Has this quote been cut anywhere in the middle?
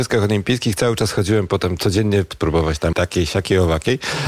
yes; 2 cuts; at 2.3 s, 2.9 s

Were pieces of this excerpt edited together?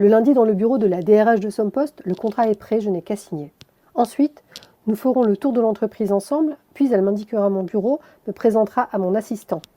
no; 0 cuts

